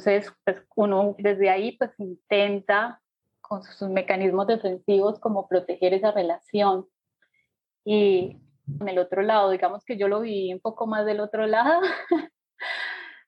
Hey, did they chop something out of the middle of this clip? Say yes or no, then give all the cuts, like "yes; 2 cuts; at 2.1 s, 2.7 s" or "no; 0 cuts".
yes; 2 cuts; at 1.2 s, 8.8 s